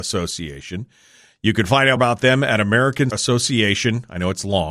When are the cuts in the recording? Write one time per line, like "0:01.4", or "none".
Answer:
0:02.0
0:03.1